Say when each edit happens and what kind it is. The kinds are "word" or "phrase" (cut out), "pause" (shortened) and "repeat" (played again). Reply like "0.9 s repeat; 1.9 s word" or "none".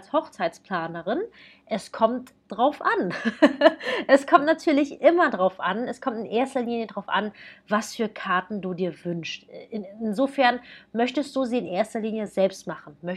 none